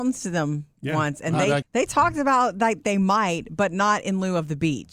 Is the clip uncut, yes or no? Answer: no